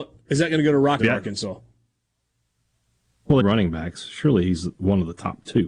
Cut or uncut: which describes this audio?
cut